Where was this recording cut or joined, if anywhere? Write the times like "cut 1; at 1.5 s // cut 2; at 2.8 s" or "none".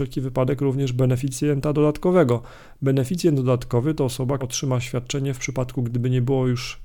cut 1; at 4.4 s

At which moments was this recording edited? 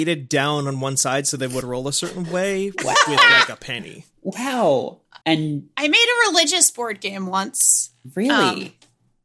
cut 1; at 1.6 s // cut 2; at 5.2 s

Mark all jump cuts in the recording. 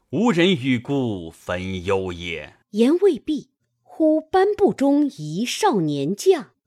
cut 1; at 2.6 s

